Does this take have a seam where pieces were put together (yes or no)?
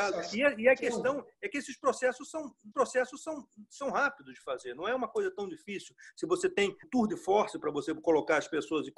yes